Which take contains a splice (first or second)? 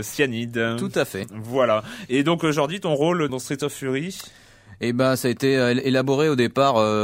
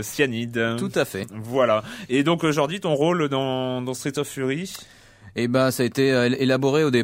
first